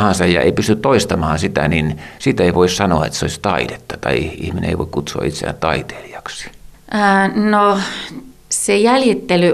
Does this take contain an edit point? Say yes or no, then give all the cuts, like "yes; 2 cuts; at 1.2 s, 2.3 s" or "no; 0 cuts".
no; 0 cuts